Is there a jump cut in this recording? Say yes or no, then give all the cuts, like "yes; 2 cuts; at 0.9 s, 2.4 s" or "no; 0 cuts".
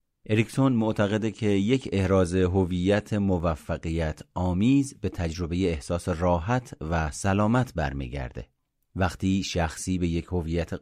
no; 0 cuts